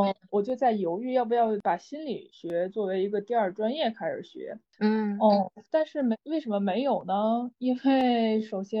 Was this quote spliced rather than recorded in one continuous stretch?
yes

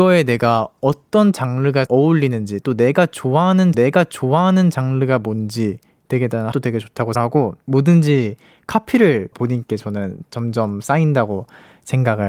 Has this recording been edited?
yes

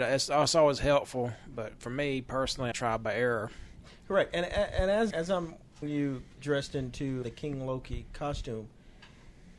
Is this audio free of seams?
no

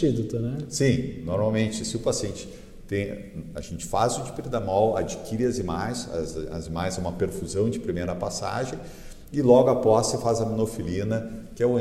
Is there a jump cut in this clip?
no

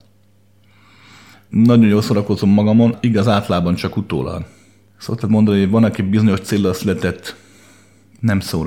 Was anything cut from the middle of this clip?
no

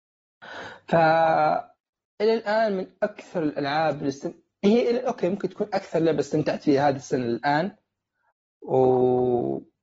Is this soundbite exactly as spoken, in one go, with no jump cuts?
yes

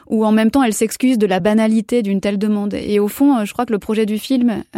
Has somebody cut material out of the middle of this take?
no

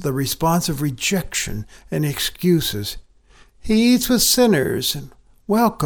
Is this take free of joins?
yes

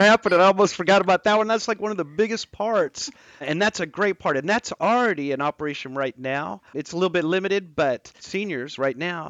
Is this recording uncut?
no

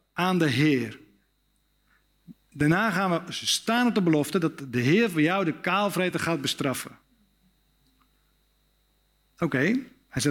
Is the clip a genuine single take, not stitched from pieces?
yes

